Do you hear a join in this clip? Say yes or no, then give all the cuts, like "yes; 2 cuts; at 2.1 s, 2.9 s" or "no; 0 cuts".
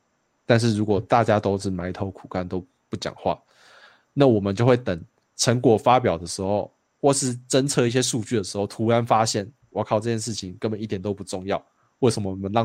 no; 0 cuts